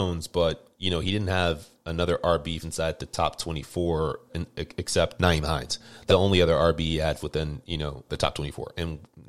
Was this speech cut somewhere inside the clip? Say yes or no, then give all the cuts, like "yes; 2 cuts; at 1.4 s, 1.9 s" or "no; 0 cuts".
yes; 6 cuts; at 2.6 s, 4.3 s, 5.2 s, 6.1 s, 7.2 s, 8.1 s